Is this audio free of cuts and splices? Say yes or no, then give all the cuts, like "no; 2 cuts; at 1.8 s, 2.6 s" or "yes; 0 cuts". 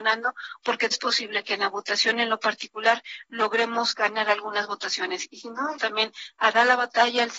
no; 2 cuts; at 0.9 s, 5.8 s